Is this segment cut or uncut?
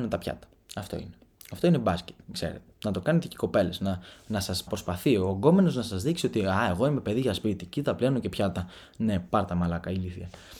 cut